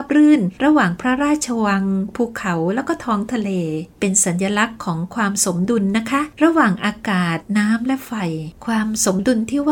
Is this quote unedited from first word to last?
no; 2 cuts; at 3.9 s, 8.6 s

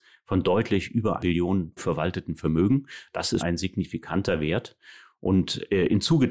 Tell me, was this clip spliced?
yes; 3 cuts; at 1.2 s, 1.8 s, 3.4 s

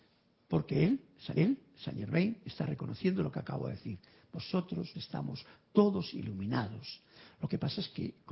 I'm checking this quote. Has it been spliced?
yes; 2 cuts; at 1.4 s, 4.9 s

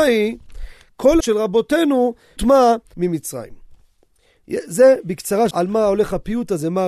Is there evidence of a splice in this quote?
yes; 4 cuts; at 1.2 s, 2.4 s, 2.9 s, 5.5 s

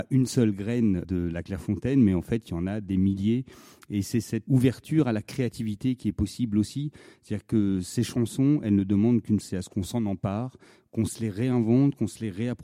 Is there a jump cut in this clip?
yes; 3 cuts; at 1.0 s, 4.5 s, 9.4 s

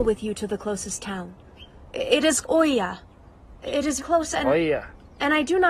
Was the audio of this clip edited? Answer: yes; 2 cuts; at 2.4 s, 4.0 s

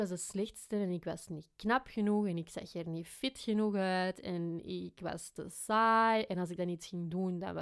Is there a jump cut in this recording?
no; 0 cuts

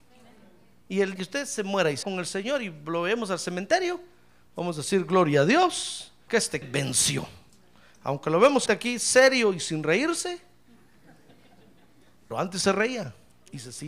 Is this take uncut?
no; 6 cuts; at 1.2 s, 2.0 s, 6.3 s, 6.6 s, 8.7 s, 12.3 s

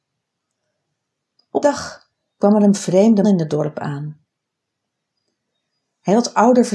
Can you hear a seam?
yes; 2 cuts; at 1.6 s, 3.2 s

